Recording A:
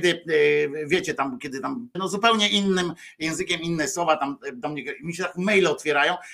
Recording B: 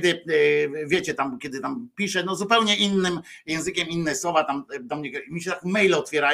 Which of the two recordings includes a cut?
A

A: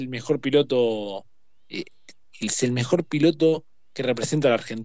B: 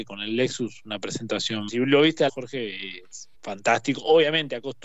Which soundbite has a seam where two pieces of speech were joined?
B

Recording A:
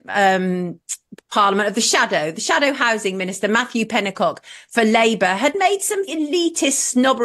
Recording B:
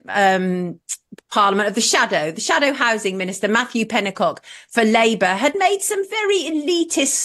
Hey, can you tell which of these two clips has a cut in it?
A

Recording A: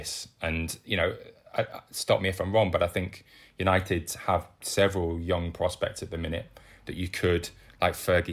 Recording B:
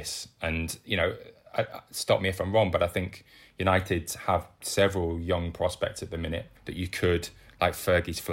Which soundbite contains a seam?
B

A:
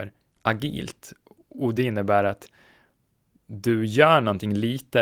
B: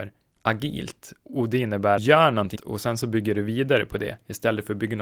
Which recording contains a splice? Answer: B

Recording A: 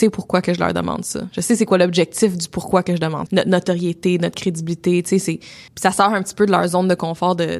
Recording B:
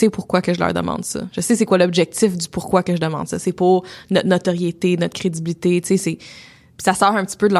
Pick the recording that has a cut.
A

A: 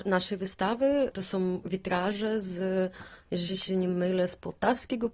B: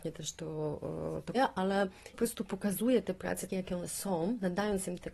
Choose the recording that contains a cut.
B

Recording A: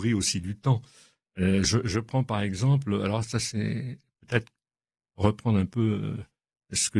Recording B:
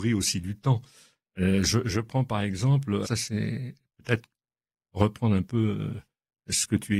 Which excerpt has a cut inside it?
B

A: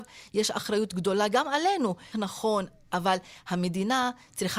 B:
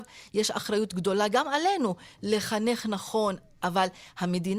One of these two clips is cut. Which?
A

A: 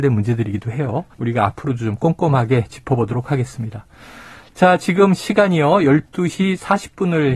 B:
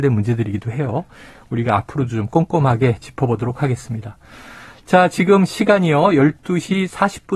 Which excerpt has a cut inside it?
A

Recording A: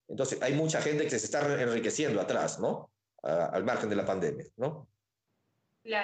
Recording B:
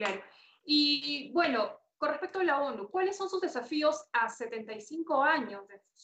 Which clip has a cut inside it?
A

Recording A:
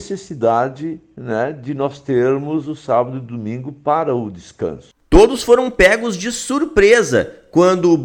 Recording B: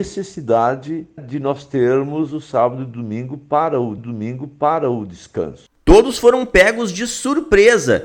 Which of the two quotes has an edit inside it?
B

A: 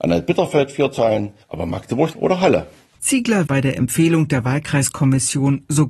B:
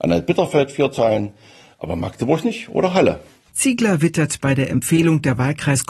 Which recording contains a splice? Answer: A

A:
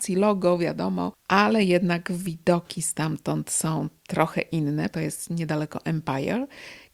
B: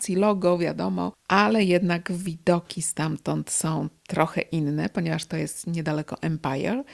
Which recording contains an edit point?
A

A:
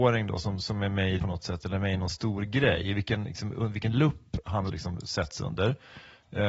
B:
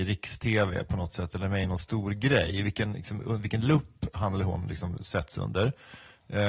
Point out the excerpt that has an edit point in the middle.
A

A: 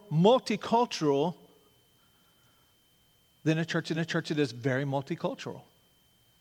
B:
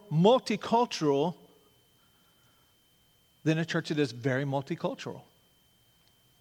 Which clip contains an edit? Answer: A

